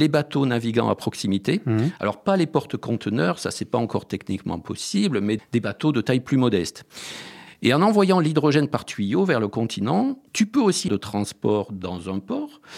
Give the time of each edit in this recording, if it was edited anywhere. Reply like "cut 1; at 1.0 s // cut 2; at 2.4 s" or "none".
cut 1; at 5.4 s // cut 2; at 10.3 s // cut 3; at 10.9 s